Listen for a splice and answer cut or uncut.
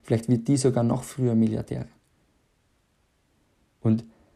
uncut